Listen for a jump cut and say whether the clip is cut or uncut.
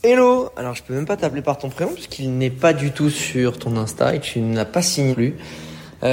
cut